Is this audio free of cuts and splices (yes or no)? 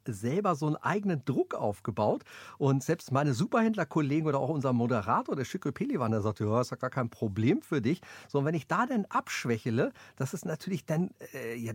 yes